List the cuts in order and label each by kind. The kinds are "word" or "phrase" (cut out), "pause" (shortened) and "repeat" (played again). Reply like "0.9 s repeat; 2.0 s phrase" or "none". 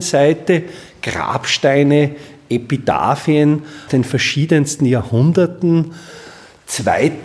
3.9 s word